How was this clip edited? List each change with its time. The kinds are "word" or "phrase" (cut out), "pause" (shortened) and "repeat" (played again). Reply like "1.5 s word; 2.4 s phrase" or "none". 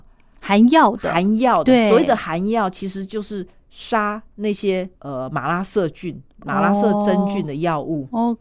5.0 s pause